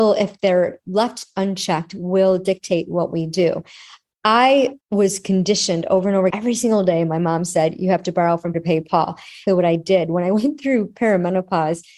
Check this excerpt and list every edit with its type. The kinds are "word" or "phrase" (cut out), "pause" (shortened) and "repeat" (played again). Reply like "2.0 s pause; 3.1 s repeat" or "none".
4.8 s pause; 6.3 s word; 8.5 s word; 9.5 s phrase